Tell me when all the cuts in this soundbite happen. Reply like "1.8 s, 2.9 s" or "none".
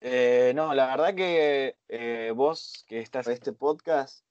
1.8 s, 3.3 s